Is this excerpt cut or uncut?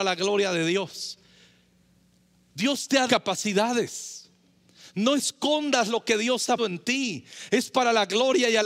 cut